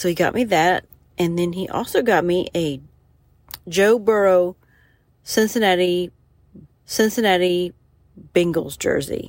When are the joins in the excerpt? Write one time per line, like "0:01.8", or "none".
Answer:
0:06.6